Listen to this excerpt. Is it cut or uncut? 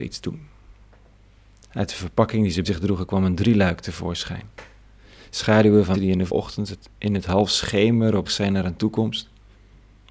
cut